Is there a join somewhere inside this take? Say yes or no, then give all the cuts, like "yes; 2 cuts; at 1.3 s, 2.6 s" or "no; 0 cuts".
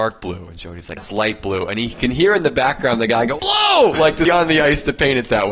yes; 3 cuts; at 1.0 s, 3.4 s, 4.2 s